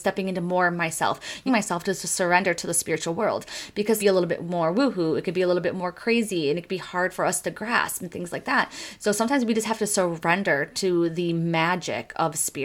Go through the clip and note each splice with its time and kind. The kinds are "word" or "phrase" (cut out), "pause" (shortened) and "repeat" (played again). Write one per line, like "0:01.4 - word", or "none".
0:01.5 - phrase
0:04.0 - phrase